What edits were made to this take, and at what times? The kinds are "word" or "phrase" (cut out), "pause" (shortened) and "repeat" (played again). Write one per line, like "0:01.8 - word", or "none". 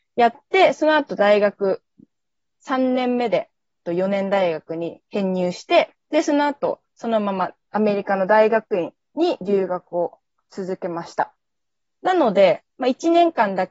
0:03.8 - phrase
0:06.0 - pause
0:06.9 - pause
0:11.6 - pause
0:12.7 - pause